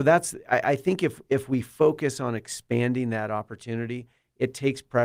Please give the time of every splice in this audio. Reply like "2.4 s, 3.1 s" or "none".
none